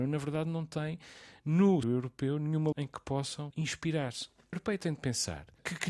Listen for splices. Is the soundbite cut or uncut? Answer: cut